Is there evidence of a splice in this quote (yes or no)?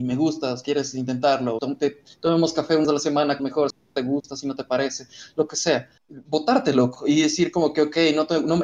yes